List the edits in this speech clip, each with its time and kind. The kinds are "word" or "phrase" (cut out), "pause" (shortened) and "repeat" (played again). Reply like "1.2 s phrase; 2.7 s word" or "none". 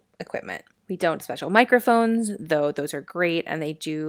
1.2 s word

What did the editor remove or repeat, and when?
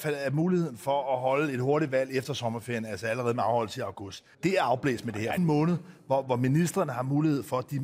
4.3 s pause; 5.4 s phrase

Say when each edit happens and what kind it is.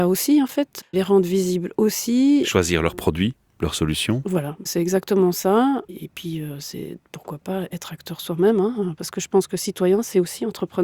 none

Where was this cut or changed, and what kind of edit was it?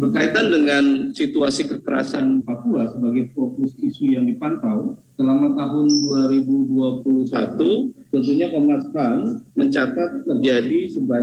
2.4 s word

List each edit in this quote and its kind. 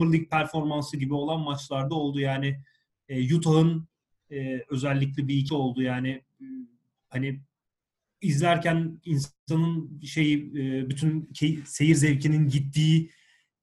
5.5 s word

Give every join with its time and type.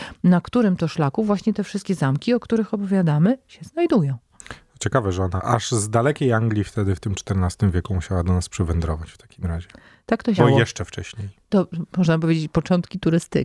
5.4 s word; 10.4 s word

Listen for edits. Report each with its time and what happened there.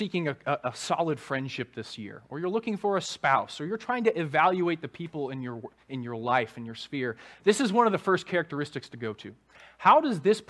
none

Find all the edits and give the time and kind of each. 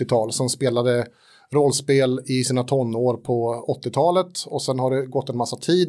none

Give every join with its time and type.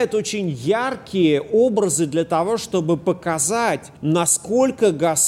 4.0 s pause

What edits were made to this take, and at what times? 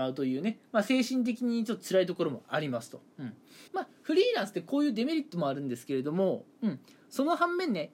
3.7 s pause

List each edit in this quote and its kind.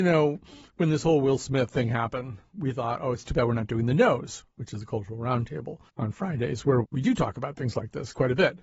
5.9 s pause; 6.8 s word

